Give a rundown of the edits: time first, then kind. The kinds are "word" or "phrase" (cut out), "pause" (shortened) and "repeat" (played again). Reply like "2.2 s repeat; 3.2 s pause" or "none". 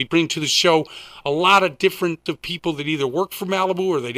2.3 s word